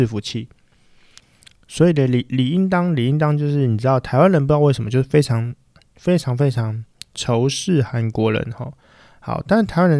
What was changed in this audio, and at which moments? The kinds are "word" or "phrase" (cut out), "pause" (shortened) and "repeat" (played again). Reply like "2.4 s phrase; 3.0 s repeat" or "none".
none